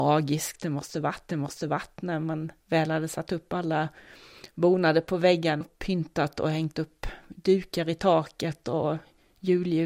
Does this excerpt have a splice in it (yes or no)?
yes